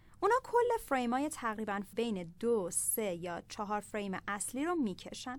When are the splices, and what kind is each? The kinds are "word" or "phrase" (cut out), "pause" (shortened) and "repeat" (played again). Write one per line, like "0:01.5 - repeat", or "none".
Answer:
0:01.9 - word